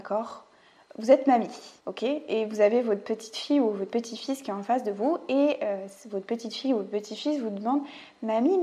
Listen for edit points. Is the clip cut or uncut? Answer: cut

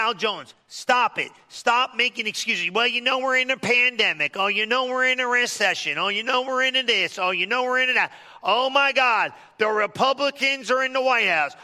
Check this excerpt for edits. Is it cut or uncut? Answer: uncut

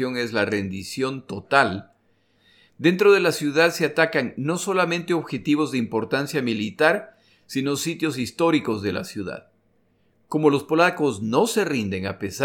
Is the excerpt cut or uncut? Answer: uncut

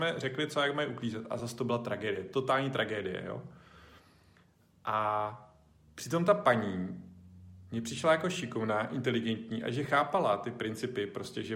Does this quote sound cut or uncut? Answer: uncut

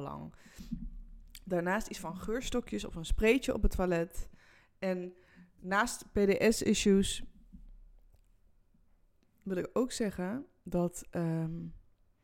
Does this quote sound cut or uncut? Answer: uncut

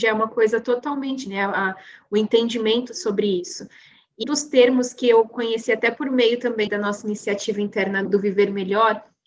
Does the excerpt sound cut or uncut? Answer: cut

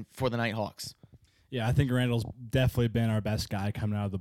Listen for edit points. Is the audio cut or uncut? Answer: uncut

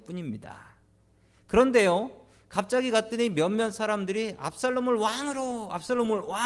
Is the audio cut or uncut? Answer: uncut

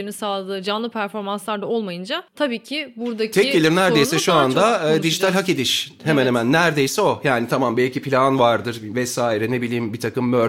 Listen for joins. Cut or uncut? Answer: cut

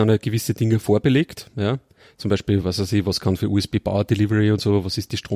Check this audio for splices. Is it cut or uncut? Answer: uncut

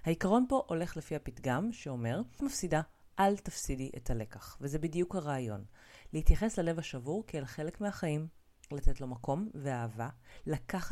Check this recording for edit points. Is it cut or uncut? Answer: cut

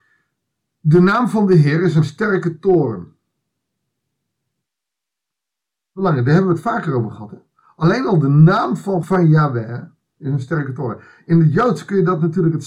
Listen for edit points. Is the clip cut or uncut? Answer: cut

